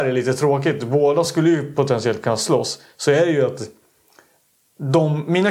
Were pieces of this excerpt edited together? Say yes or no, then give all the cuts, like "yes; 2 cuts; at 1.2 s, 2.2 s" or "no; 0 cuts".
no; 0 cuts